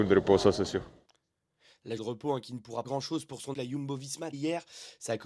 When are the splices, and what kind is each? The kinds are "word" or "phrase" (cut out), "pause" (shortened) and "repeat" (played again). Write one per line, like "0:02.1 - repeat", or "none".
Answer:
0:02.0 - word
0:02.8 - word
0:03.5 - word
0:04.3 - word